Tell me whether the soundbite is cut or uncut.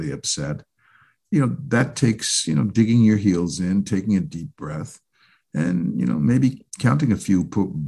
cut